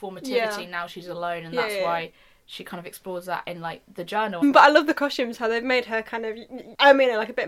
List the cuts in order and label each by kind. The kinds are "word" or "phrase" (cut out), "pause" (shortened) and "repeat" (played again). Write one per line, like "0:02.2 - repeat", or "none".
none